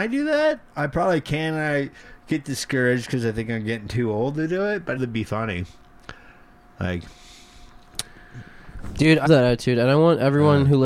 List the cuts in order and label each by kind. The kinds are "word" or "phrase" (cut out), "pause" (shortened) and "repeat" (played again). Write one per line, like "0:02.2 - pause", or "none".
0:05.0 - phrase
0:09.3 - word